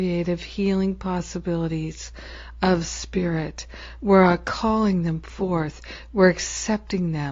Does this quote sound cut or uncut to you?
uncut